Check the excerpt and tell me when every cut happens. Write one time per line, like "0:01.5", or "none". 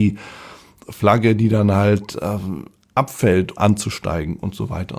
0:03.6